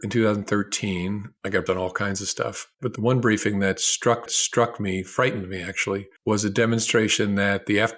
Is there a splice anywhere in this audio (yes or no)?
yes